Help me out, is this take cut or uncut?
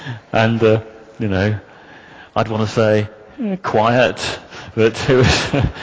uncut